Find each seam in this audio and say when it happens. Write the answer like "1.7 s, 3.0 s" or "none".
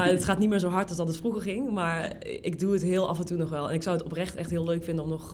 none

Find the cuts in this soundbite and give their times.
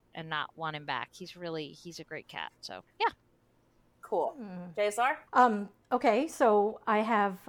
2.9 s, 5.3 s

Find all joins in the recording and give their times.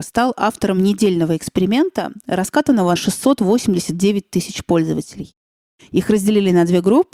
3.0 s

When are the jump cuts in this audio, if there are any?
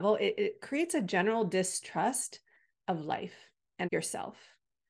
3.8 s

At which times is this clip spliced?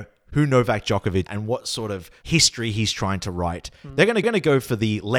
1.3 s, 4.2 s

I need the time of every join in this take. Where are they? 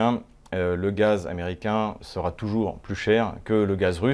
2.0 s

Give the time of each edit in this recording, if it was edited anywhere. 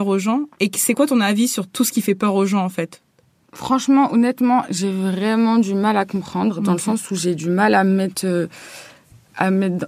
none

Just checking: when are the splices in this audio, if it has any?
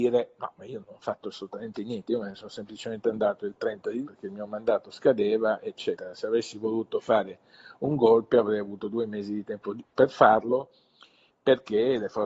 4.0 s, 9.8 s

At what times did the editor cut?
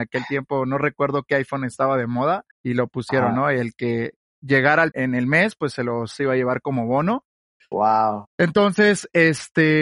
2.5 s, 4.9 s

